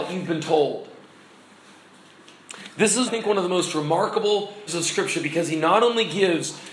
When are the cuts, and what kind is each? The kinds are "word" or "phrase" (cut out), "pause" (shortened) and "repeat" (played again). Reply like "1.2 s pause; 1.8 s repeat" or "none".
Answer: 3.1 s word; 4.7 s word